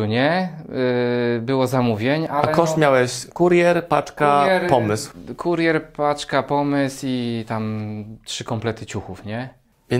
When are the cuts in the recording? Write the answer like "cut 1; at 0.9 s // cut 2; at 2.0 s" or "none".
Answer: cut 1; at 3.3 s